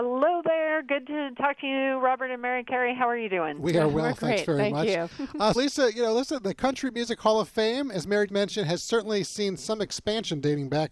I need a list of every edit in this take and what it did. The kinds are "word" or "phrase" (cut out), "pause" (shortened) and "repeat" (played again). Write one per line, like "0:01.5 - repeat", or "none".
0:05.6 - word
0:08.3 - word